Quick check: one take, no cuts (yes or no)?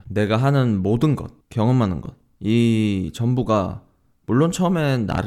no